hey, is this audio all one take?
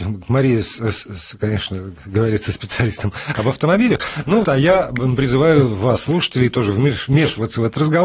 no; 1 cut; at 4.4 s

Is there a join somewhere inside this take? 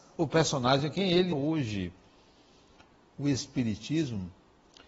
yes; 1 cut; at 1.3 s

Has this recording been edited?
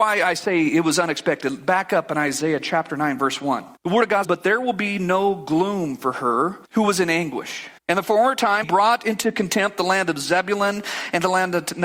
yes; 5 cuts; at 3.8 s, 4.2 s, 6.6 s, 7.8 s, 8.6 s

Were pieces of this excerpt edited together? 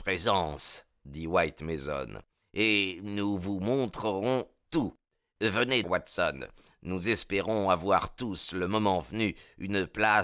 yes; 1 cut; at 5.8 s

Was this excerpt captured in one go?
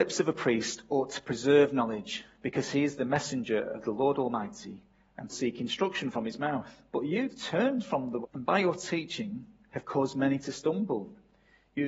no; 3 cuts; at 5.3 s, 6.9 s, 8.2 s

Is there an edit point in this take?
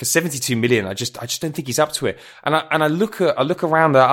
no; 0 cuts

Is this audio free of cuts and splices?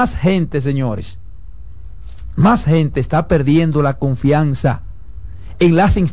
yes; 0 cuts

